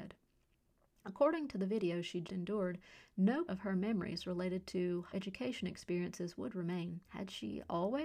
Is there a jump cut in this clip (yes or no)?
yes